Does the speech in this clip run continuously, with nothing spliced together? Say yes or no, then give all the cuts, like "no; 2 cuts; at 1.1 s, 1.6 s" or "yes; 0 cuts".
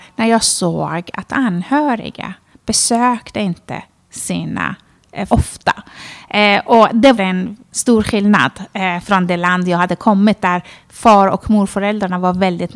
no; 2 cuts; at 5.3 s, 7.2 s